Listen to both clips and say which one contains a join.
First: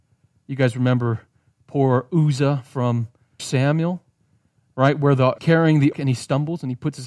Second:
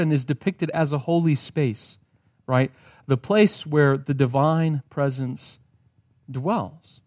first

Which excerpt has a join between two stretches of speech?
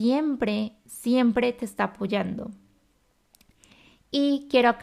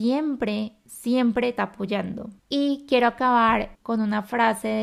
second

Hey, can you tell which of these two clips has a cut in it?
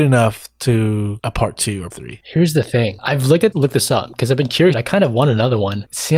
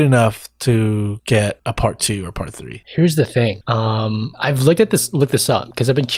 first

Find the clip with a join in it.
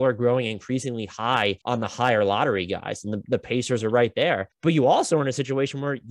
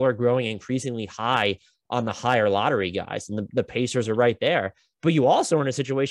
first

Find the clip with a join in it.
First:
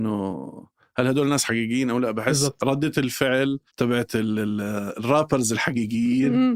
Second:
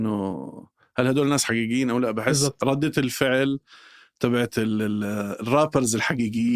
first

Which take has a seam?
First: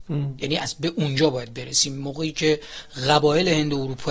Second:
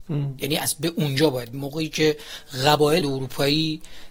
second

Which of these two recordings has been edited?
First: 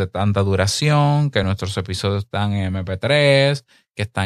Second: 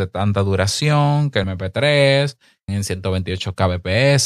second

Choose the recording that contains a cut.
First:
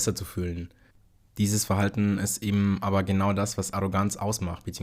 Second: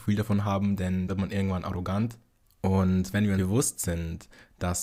second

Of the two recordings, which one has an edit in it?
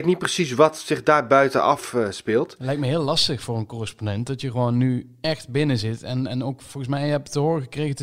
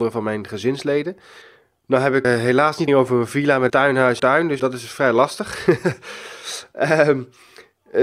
second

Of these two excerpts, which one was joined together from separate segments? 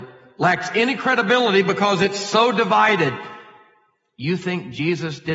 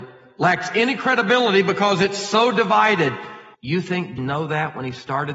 second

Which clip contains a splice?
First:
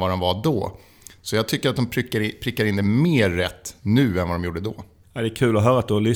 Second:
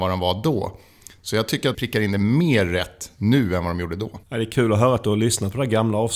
second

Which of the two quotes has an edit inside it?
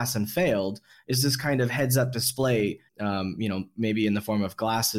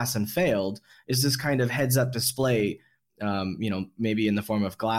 first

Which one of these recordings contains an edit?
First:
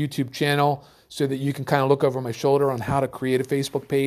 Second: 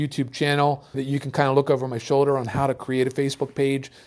second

